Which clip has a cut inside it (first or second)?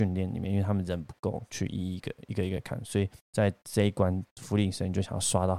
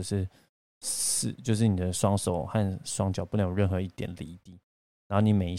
first